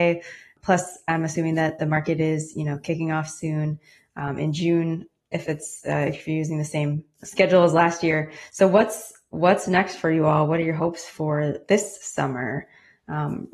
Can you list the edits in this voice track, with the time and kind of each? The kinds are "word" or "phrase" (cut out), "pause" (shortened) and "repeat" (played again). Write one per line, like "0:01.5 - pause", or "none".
none